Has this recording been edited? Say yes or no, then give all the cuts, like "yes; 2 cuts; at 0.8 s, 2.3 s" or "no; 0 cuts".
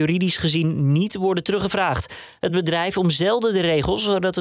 no; 0 cuts